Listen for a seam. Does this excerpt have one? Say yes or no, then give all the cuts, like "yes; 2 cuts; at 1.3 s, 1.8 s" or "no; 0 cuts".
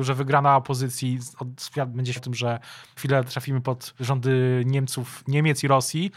yes; 3 cuts; at 2.2 s, 3.0 s, 4.0 s